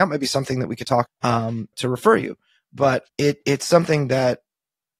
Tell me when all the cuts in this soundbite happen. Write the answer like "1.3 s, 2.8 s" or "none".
1.1 s, 1.7 s, 3.1 s